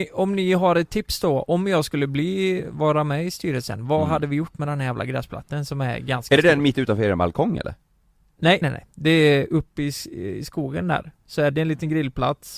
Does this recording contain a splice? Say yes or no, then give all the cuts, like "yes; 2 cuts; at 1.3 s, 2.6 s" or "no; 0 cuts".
yes; 2 cuts; at 8.6 s, 11.5 s